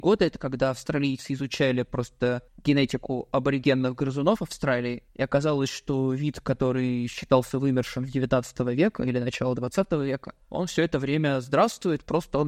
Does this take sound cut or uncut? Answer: cut